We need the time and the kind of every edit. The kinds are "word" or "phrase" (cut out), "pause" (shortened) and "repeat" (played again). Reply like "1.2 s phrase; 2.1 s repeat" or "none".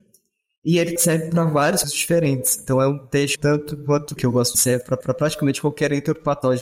1.0 s word; 1.8 s word; 3.3 s word; 4.2 s word; 4.5 s phrase; 5.0 s repeat